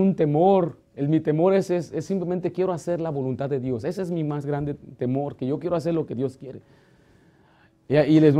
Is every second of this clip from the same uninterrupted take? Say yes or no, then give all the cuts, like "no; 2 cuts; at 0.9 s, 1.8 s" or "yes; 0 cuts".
yes; 0 cuts